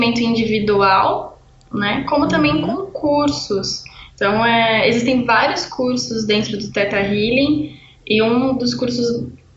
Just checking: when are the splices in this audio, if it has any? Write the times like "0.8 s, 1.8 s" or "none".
none